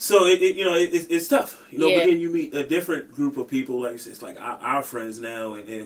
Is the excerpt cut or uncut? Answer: cut